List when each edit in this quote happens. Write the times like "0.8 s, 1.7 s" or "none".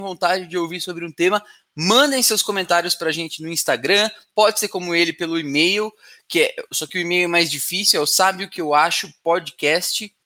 none